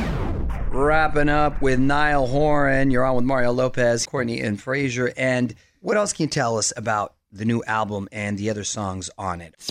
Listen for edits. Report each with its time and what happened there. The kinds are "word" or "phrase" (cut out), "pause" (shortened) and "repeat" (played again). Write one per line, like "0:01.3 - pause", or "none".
0:04.1 - phrase